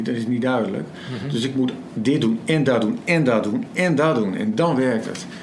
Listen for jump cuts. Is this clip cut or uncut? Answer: uncut